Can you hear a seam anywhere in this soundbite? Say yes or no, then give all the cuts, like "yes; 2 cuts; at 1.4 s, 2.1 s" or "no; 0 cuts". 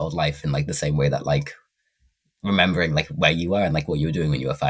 no; 0 cuts